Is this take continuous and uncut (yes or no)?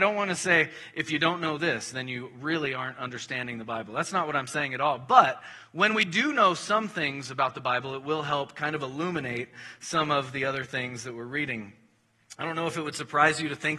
yes